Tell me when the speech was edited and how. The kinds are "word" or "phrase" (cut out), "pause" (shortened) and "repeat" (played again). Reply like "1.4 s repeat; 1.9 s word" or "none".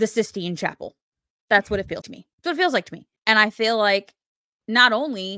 2.0 s word; 2.3 s pause; 3.2 s pause

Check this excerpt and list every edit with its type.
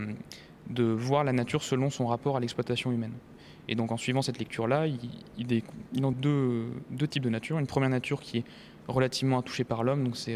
6.1 s word

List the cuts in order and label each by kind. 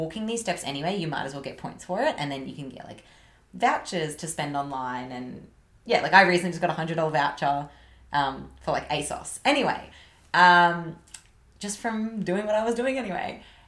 none

